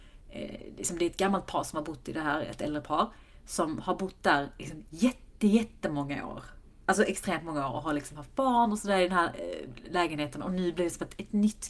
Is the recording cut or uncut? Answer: uncut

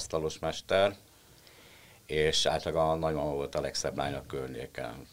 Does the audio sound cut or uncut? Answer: uncut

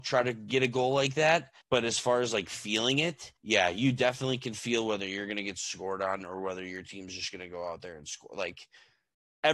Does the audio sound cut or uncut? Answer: cut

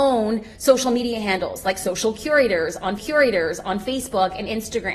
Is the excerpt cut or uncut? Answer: cut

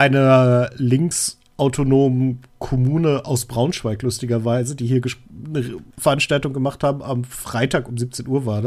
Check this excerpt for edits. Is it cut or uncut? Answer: cut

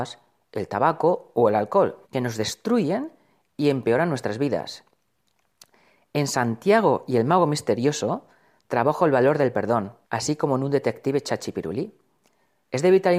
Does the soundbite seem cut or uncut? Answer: cut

